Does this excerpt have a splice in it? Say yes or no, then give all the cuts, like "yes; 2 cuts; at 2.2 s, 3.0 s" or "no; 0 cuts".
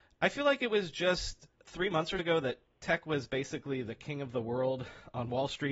yes; 1 cut; at 2.2 s